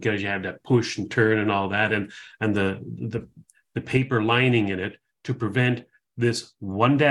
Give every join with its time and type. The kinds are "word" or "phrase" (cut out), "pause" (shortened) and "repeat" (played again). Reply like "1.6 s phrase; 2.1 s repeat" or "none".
none